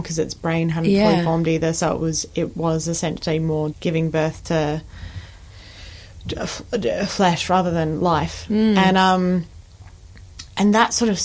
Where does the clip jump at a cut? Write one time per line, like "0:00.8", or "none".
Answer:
0:03.7